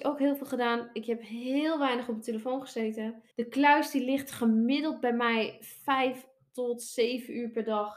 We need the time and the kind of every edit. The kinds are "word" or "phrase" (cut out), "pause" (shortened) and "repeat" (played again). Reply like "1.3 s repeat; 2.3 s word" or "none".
3.3 s pause

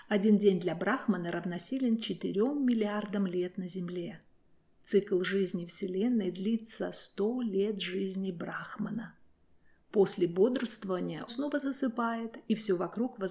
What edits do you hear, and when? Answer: 11.3 s word

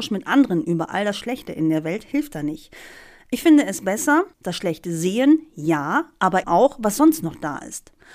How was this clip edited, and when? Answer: 4.3 s pause; 6.4 s word

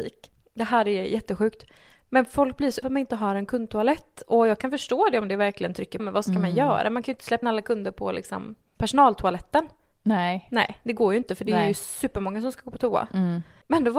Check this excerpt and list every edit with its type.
2.8 s word; 6.0 s word; 7.4 s word

